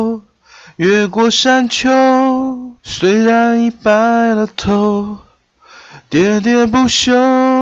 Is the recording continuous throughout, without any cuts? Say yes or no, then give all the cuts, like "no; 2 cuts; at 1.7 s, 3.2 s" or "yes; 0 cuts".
no; 1 cut; at 2.8 s